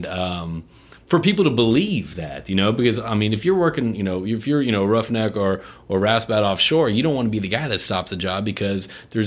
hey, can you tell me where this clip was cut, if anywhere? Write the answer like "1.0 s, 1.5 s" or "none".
none